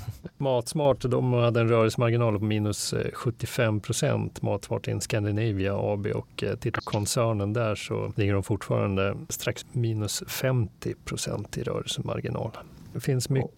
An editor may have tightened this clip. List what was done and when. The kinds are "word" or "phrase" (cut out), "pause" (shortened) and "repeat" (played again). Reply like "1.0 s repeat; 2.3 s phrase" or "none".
9.6 s word